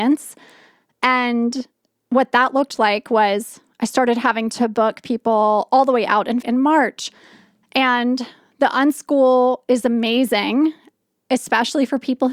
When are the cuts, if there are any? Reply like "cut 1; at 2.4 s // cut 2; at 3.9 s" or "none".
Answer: cut 1; at 6.4 s